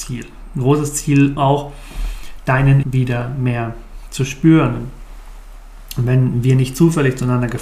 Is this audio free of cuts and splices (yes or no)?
no